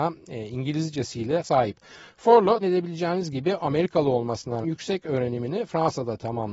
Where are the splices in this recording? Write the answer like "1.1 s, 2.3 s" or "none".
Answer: 1.4 s, 2.6 s, 4.6 s